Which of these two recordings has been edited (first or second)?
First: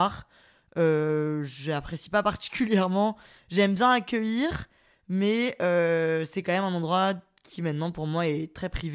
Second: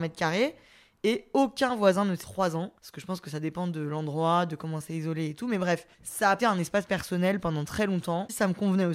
second